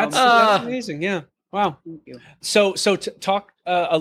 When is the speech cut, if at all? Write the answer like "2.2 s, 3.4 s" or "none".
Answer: none